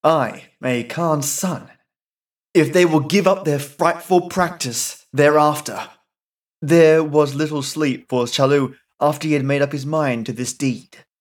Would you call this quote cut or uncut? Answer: uncut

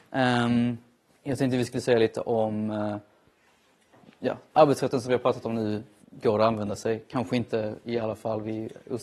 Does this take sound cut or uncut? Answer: cut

